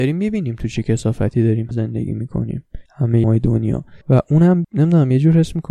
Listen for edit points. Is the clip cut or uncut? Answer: cut